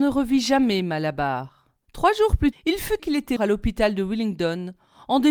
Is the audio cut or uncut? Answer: cut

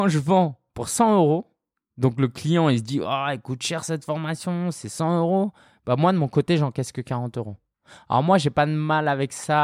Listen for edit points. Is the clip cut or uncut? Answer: uncut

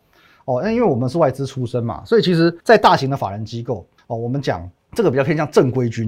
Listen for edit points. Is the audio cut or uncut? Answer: cut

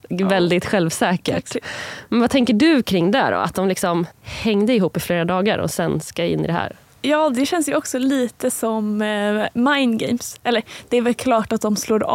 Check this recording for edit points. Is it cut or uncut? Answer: cut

